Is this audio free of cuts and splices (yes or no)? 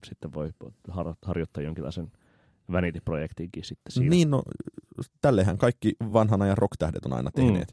yes